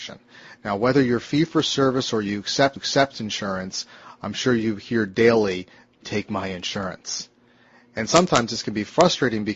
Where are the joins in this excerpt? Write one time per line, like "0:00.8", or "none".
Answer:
0:02.8
0:06.0

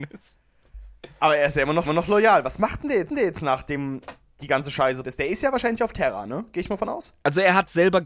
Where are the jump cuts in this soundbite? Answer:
0:01.9
0:03.1
0:05.0

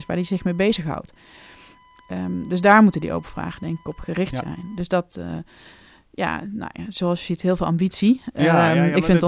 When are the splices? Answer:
none

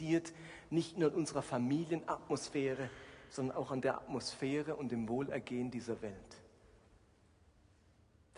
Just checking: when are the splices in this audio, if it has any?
none

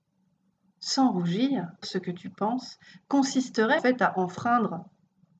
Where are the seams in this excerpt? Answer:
0:01.8
0:03.8

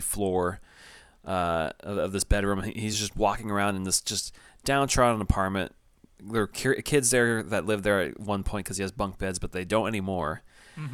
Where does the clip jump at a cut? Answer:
none

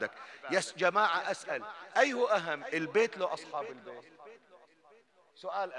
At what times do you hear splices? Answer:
none

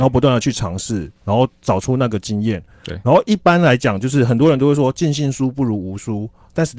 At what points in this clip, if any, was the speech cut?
0:01.2

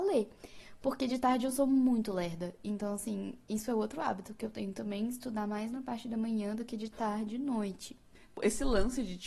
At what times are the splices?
none

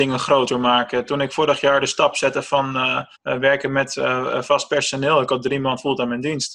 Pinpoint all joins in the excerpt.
0:03.1

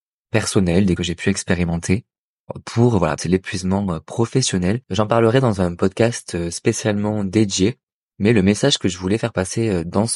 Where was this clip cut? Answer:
0:01.0
0:03.2
0:04.8

